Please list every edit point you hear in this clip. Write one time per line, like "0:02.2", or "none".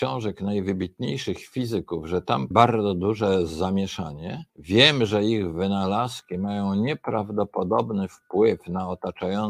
0:02.5
0:04.5